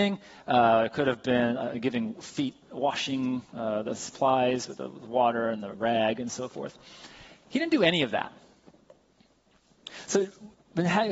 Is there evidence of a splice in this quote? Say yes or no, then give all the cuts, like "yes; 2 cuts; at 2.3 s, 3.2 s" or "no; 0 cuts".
no; 0 cuts